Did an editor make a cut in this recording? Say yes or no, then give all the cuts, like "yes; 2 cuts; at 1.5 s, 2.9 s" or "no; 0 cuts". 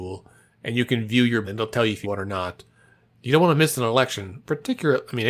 yes; 3 cuts; at 1.4 s, 2.0 s, 3.2 s